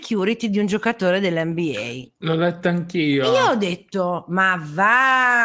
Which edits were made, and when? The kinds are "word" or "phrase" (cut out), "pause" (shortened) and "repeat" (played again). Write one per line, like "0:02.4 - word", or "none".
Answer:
none